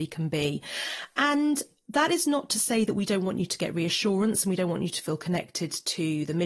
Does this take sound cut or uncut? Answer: uncut